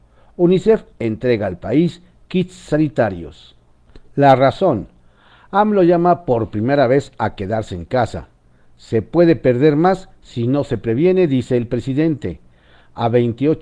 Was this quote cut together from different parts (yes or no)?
no